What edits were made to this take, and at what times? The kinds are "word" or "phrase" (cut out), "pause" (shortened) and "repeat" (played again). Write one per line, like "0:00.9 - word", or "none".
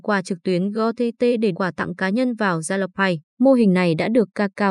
0:01.5 - phrase
0:03.3 - pause